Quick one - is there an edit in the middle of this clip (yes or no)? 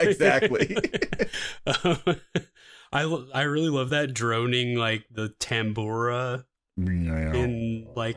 no